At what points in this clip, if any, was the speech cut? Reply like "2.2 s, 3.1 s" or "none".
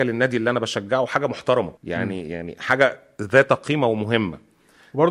1.8 s